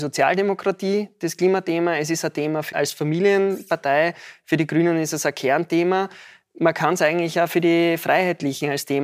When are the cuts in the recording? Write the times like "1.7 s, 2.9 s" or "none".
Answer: 2.7 s